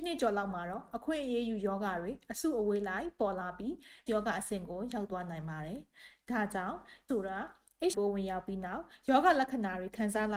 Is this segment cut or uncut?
cut